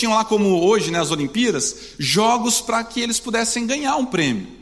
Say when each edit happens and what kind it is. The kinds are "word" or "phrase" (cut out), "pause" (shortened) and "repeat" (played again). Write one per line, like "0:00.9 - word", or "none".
none